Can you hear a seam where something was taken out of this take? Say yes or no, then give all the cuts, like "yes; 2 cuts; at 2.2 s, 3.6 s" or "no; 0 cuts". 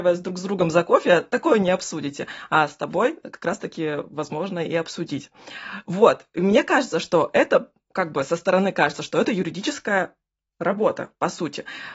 no; 0 cuts